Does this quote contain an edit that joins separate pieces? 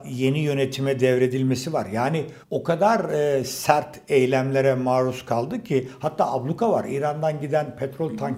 yes; 1 cut; at 2.4 s

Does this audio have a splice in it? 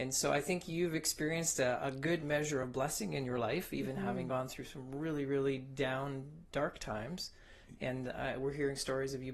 no; 0 cuts

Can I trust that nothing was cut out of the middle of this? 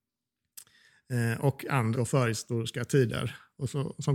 no; 1 cut; at 1.9 s

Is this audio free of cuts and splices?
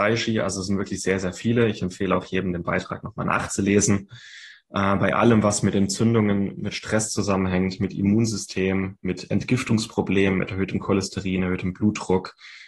yes; 0 cuts

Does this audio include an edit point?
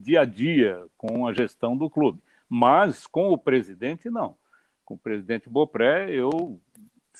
no; 0 cuts

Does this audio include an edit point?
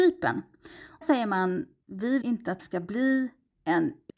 yes; 3 cuts; at 1.0 s, 2.2 s, 2.6 s

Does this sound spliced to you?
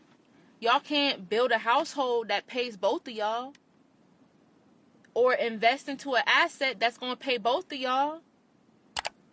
no; 0 cuts

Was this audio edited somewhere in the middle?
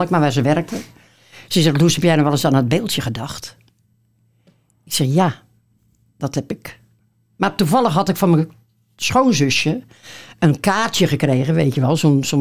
no; 0 cuts

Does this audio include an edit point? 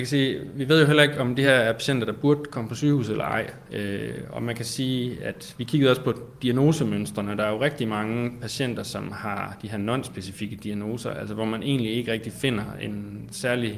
no; 0 cuts

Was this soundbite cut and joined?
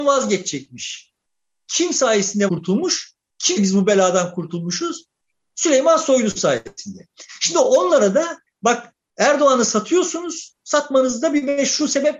yes; 3 cuts; at 2.5 s, 3.6 s, 8.5 s

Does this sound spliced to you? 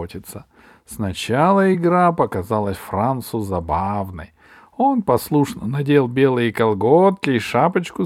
no; 0 cuts

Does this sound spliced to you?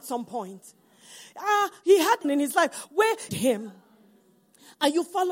yes; 2 cuts; at 2.2 s, 3.3 s

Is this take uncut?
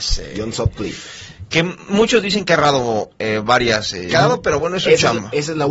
no; 1 cut; at 4.1 s

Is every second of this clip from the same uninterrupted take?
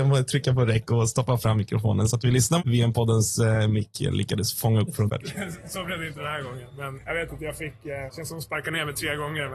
no; 4 cuts; at 2.6 s, 5.1 s, 7.0 s, 8.1 s

